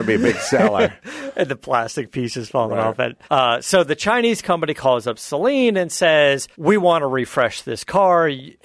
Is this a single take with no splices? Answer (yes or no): no